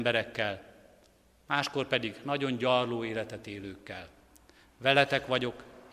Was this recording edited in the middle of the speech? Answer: no; 0 cuts

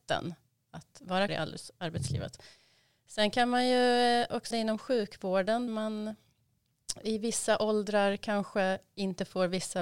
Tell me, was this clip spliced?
yes; 3 cuts; at 1.3 s, 4.5 s, 5.7 s

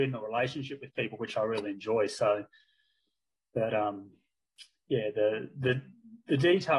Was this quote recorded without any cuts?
yes; 0 cuts

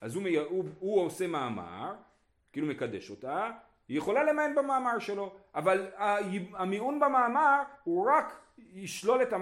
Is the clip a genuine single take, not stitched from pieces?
yes; 0 cuts

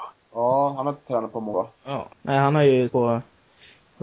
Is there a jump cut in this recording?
yes; 3 cuts; at 1.5 s, 2.1 s, 2.9 s

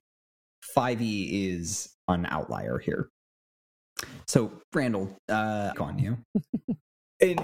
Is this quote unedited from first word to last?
no; 1 cut; at 5.7 s

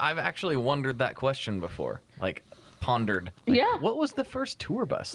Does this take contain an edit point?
yes; 1 cut; at 2.1 s

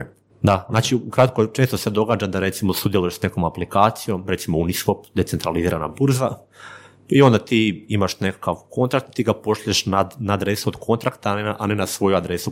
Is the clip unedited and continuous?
yes; 0 cuts

